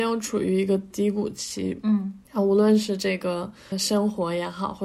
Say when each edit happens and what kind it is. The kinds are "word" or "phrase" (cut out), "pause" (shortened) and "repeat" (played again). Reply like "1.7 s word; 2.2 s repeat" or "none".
2.2 s pause; 3.7 s word